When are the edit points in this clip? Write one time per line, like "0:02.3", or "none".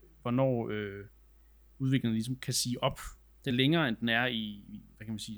0:03.5